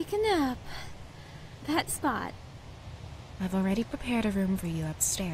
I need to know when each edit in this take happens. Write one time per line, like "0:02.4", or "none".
0:01.9